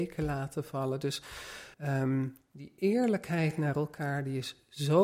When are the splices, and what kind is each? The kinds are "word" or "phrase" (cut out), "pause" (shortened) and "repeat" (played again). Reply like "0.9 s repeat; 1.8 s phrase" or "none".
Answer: 1.7 s pause